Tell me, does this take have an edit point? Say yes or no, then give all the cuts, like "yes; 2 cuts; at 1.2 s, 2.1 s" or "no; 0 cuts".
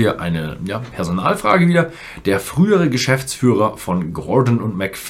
no; 0 cuts